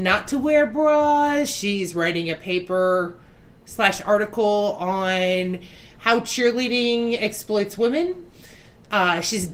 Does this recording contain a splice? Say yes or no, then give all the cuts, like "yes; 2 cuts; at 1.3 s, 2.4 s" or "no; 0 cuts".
no; 0 cuts